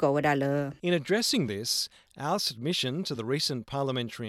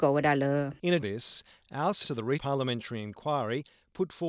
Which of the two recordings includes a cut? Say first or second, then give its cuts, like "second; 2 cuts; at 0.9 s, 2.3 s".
second; 3 cuts; at 1.0 s, 2.0 s, 2.4 s